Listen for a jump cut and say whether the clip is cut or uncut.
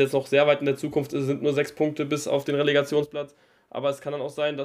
uncut